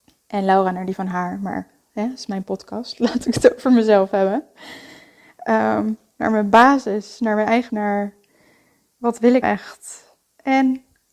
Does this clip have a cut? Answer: yes; 2 cuts; at 7.7 s, 9.4 s

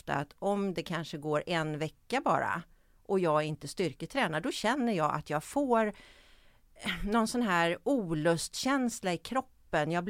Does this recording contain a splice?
no; 0 cuts

